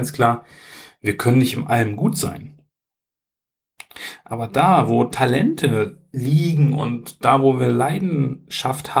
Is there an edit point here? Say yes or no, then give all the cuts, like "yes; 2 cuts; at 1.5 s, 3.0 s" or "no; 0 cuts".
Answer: no; 0 cuts